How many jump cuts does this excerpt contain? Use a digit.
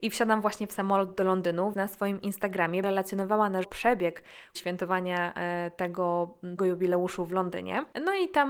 5